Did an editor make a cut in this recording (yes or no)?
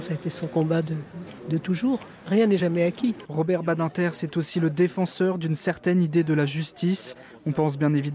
no